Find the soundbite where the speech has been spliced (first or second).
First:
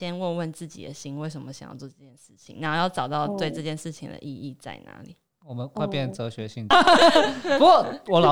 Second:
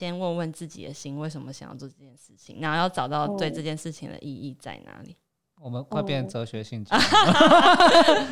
first